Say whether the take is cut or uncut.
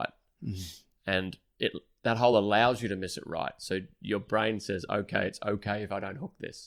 uncut